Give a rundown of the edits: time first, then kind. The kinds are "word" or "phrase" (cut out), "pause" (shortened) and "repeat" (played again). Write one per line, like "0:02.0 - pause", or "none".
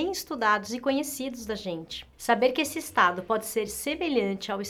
none